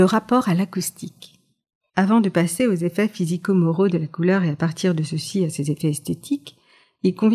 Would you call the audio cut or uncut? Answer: uncut